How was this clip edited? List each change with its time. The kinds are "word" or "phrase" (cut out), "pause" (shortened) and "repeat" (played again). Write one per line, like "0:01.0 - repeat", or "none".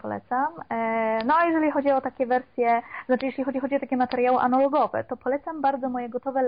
0:03.5 - repeat